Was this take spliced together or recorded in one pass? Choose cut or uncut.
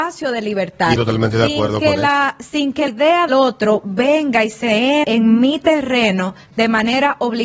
cut